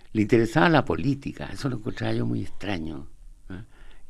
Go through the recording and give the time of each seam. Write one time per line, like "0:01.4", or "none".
none